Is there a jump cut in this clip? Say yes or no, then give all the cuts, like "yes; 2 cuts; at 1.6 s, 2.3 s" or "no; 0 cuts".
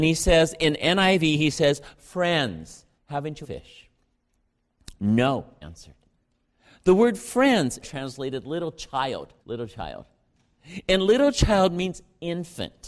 yes; 5 cuts; at 3.0 s, 3.4 s, 5.6 s, 7.8 s, 9.4 s